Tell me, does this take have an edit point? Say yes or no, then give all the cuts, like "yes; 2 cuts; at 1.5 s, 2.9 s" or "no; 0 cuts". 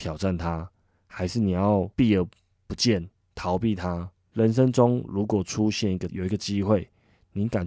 yes; 1 cut; at 6.1 s